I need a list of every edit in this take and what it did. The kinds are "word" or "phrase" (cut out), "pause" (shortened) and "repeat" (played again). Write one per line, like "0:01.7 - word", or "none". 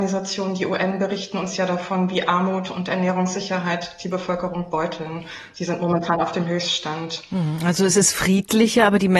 none